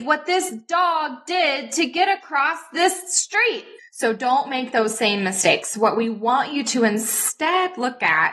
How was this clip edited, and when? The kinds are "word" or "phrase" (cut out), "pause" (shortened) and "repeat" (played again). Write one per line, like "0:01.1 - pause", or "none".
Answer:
none